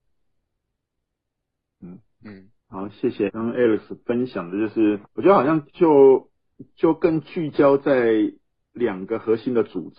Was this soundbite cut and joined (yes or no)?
yes